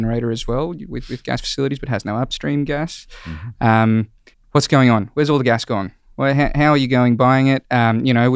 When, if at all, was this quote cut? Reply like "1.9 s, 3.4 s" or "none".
4.3 s

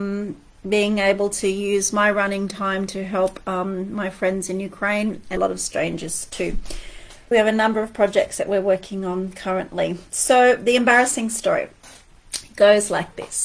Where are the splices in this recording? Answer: 5.4 s, 7.3 s

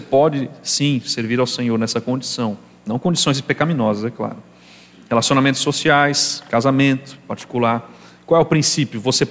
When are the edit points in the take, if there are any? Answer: none

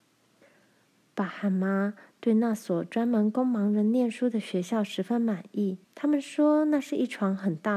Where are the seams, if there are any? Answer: 5.8 s

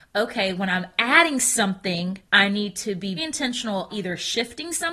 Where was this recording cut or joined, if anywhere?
2.2 s, 3.2 s, 3.9 s

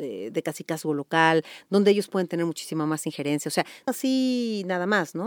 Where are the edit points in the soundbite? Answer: 3.9 s

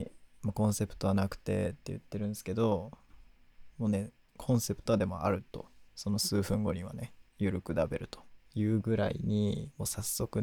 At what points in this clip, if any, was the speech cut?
5.9 s, 7.3 s, 8.4 s

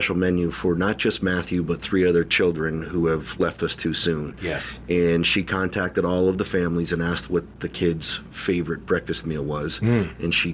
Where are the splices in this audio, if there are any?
none

